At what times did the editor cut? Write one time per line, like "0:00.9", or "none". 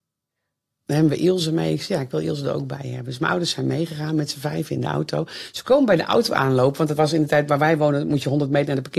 none